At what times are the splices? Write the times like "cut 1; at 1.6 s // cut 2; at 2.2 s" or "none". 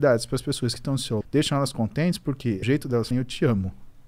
cut 1; at 1.2 s // cut 2; at 2.6 s // cut 3; at 3.1 s